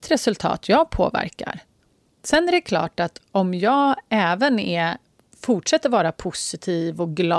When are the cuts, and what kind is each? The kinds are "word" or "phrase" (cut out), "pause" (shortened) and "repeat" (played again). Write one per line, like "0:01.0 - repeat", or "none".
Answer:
none